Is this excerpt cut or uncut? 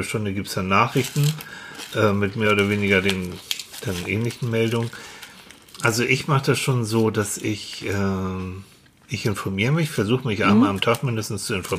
uncut